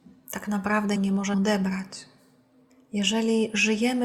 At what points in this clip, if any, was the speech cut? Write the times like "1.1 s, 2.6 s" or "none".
1.0 s, 1.3 s